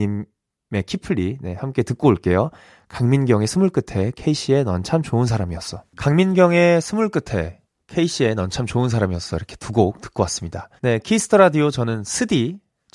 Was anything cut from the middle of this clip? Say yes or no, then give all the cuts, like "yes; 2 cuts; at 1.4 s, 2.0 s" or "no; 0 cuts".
yes; 1 cut; at 10.8 s